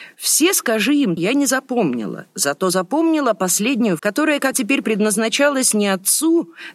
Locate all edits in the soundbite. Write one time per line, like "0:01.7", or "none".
0:01.2
0:04.0
0:04.5
0:04.8

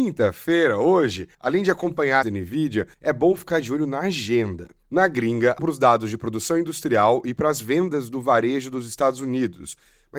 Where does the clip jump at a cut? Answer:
0:01.3
0:02.2
0:02.9
0:05.6

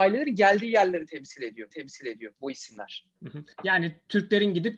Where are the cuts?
0:01.7
0:03.5

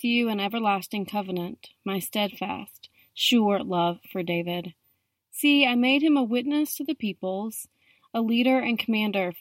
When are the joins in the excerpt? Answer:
none

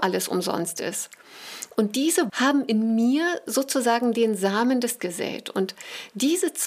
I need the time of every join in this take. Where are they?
0:02.3
0:05.0

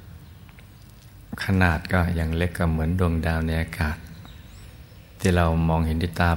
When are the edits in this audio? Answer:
none

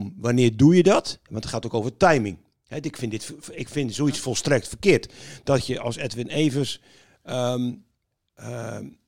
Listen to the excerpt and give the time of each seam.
none

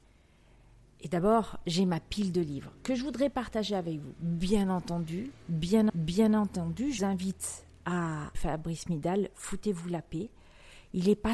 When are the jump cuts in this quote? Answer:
0:05.9
0:07.0
0:08.3

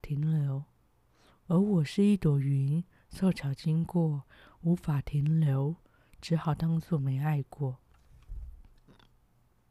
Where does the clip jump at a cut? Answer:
none

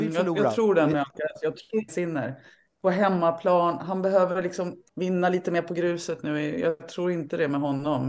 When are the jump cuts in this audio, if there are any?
0:01.9
0:04.9

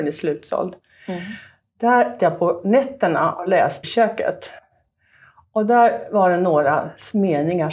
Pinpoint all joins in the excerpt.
0:02.2
0:03.8

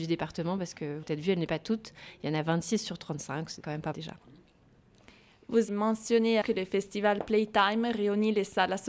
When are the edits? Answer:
0:01.0
0:01.5
0:03.6
0:03.9
0:05.7
0:06.4

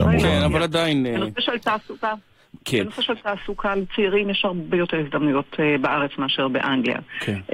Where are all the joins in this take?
none

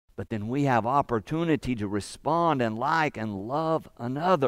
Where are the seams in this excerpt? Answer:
none

